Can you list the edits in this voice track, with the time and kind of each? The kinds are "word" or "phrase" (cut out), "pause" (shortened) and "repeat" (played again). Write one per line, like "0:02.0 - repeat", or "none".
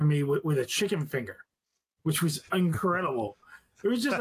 none